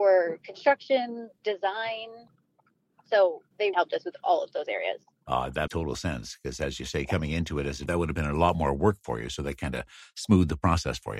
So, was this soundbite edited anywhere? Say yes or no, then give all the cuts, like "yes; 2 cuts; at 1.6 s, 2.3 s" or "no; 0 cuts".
yes; 3 cuts; at 3.7 s, 5.7 s, 7.9 s